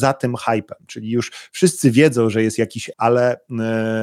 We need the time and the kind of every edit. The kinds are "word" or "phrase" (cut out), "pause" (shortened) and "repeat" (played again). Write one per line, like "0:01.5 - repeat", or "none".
0:02.9 - word

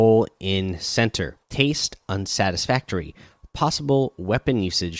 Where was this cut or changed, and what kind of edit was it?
0:01.4 - pause

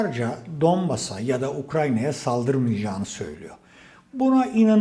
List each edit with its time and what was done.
none

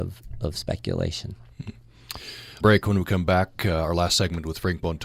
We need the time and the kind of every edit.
0:02.6 - phrase

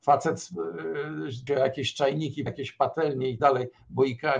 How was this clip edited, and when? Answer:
0:01.5 - phrase
0:02.5 - word
0:03.4 - word

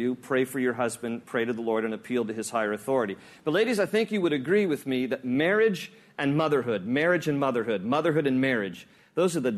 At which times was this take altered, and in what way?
none

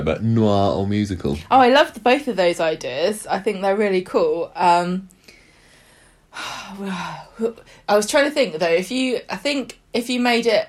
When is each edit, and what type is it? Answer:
none

